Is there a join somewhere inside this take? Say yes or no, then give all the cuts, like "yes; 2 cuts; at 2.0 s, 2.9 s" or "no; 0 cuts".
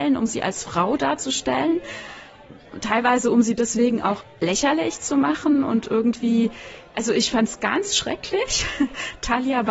no; 0 cuts